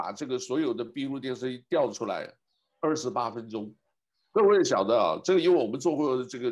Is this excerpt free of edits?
yes; 0 cuts

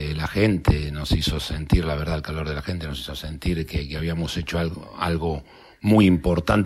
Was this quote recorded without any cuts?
yes; 0 cuts

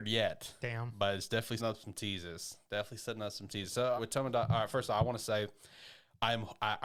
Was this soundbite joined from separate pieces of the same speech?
yes; 2 cuts; at 1.6 s, 4.0 s

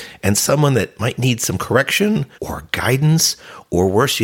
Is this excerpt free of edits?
no; 1 cut; at 2.3 s

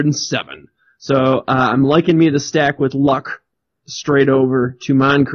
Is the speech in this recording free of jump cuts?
yes; 0 cuts

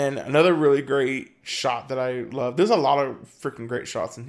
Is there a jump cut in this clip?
no; 0 cuts

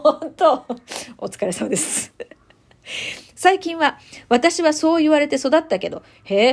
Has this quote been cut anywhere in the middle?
no; 0 cuts

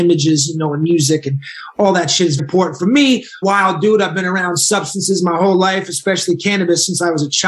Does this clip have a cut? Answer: yes; 2 cuts; at 2.4 s, 3.4 s

